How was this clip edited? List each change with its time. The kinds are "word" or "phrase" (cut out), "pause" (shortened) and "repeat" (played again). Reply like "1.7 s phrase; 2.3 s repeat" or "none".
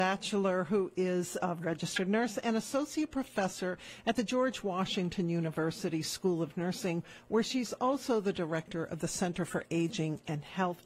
none